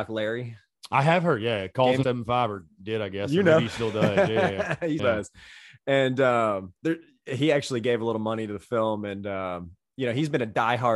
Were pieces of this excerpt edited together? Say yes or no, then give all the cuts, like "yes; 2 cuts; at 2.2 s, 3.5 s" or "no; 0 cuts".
yes; 3 cuts; at 2.0 s, 5.0 s, 6.8 s